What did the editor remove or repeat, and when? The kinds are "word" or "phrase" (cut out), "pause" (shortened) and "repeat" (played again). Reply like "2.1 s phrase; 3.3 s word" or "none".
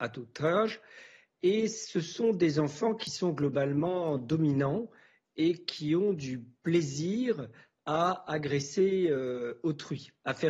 none